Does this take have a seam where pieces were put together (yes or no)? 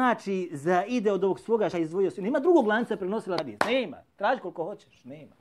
yes